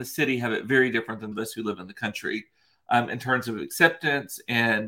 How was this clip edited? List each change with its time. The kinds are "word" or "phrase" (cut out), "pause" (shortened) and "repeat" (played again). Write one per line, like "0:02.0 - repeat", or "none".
0:01.3 - phrase